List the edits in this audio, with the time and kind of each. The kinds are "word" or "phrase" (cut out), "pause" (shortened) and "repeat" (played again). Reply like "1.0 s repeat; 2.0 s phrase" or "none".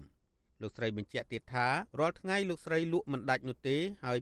1.9 s pause